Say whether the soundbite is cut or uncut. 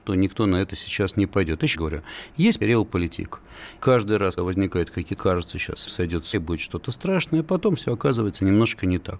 cut